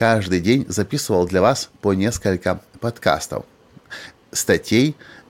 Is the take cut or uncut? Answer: uncut